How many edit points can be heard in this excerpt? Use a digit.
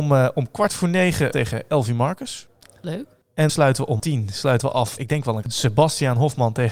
5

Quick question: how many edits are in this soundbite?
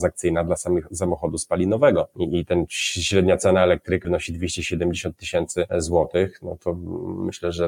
1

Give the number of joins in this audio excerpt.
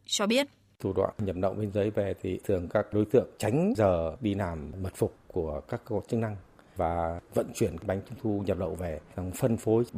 0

